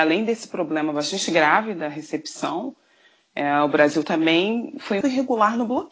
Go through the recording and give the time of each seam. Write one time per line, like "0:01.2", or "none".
0:05.0